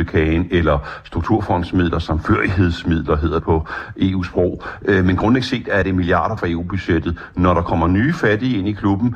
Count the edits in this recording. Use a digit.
3